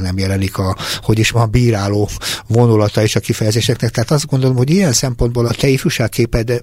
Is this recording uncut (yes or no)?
no